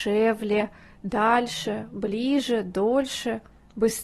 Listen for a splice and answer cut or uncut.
uncut